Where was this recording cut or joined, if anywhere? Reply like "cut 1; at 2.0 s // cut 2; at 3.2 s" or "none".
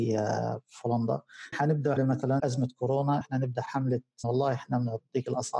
cut 1; at 1.5 s // cut 2; at 2.0 s // cut 3; at 2.4 s // cut 4; at 3.2 s // cut 5; at 4.2 s